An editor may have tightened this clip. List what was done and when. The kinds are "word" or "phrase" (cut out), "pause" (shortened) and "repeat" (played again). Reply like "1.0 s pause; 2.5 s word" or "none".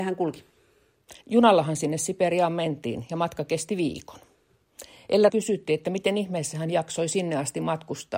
1.2 s pause; 5.3 s phrase